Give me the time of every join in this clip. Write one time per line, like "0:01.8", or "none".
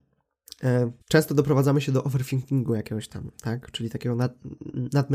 0:01.0